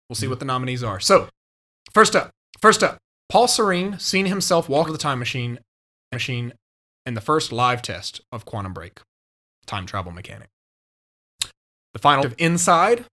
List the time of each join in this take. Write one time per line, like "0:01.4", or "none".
0:02.4
0:04.9
0:06.1
0:12.2